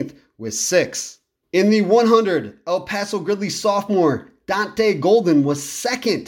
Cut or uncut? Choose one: uncut